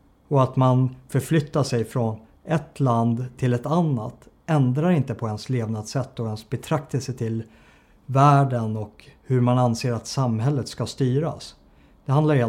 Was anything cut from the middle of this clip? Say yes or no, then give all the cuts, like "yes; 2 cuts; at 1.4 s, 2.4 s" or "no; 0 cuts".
no; 0 cuts